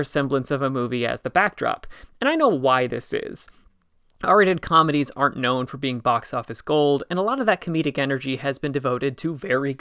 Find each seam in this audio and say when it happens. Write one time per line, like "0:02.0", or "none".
none